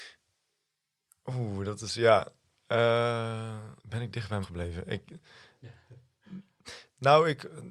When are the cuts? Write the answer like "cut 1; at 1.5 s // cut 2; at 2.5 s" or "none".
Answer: cut 1; at 3.8 s // cut 2; at 4.4 s